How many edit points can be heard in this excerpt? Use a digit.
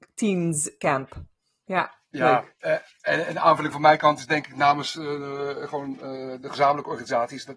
0